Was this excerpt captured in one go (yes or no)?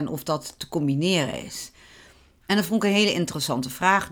yes